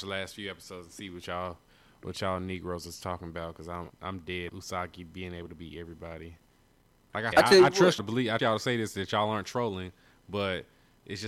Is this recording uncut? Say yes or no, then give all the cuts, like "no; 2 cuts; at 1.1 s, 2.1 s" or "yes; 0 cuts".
no; 5 cuts; at 3.9 s, 4.5 s, 7.3 s, 8.0 s, 8.4 s